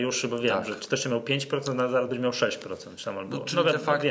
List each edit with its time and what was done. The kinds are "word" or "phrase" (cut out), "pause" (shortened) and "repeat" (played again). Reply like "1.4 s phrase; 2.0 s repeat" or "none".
none